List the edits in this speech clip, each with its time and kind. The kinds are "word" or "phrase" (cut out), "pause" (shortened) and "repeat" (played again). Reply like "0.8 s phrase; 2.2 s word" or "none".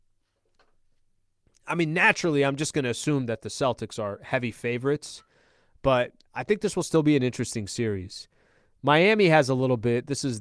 none